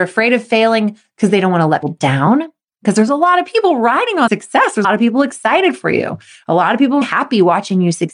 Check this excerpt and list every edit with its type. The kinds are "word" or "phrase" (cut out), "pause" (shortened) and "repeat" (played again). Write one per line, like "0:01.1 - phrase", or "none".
0:01.8 - word
0:04.3 - word
0:04.8 - word
0:07.0 - word

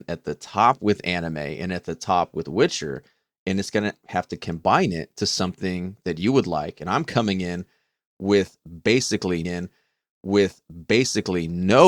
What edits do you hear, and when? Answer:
0:09.4 - repeat

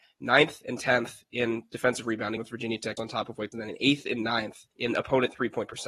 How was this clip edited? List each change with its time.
0:02.4 - word
0:03.0 - word
0:03.5 - word
0:04.7 - pause

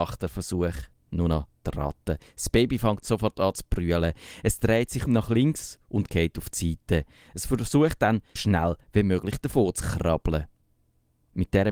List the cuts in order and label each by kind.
0:05.1 - word
0:08.4 - word

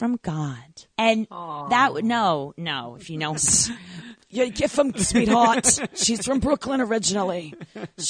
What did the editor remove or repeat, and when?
0:00.9 - pause
0:03.4 - word
0:04.9 - word

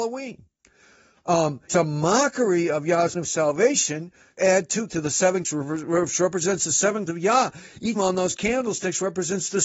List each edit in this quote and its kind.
0:01.7 - word
0:03.1 - word
0:04.4 - word
0:04.9 - word
0:05.4 - word
0:07.1 - word
0:08.0 - word

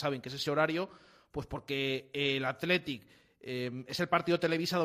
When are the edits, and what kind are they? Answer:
none

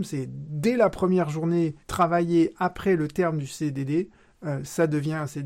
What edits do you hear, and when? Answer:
0:01.8 - pause

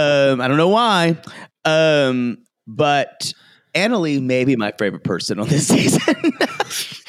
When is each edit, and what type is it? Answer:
none

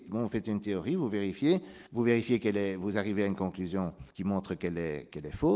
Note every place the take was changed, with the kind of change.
0:01.9 - pause
0:04.1 - pause

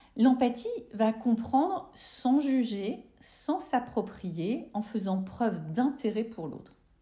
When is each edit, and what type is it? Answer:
none

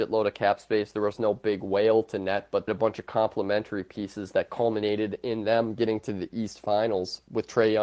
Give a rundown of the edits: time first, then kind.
0:02.7 - phrase

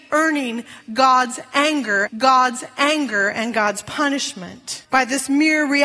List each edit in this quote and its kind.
0:02.1 - repeat
0:04.8 - pause

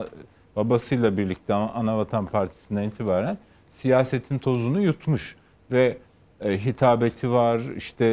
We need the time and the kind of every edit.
none

